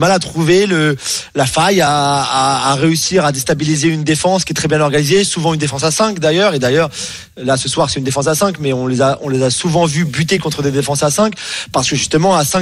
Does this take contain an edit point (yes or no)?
no